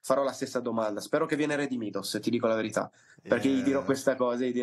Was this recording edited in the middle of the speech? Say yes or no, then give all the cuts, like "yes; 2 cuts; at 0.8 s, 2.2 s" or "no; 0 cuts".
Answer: no; 0 cuts